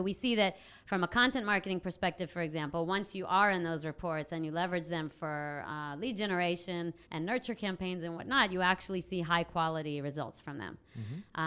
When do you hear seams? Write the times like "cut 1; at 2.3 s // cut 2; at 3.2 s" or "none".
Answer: cut 1; at 7.0 s